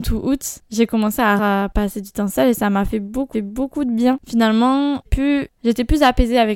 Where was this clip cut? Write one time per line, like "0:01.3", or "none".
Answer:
0:01.4
0:03.3
0:05.1